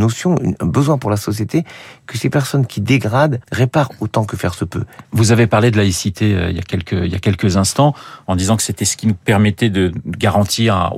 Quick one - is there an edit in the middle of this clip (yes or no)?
yes